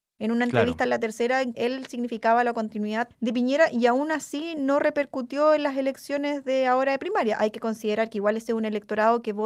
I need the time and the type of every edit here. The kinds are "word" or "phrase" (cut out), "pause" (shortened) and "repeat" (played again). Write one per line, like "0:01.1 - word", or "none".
0:01.5 - word